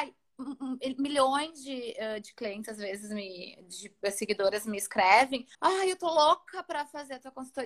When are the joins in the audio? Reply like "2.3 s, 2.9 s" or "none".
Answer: 5.5 s